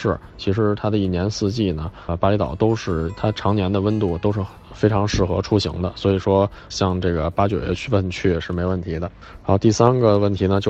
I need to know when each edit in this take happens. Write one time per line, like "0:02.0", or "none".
0:02.1
0:06.7